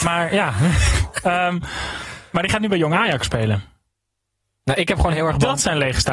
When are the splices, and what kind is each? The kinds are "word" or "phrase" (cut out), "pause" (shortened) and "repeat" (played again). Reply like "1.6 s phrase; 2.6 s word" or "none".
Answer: none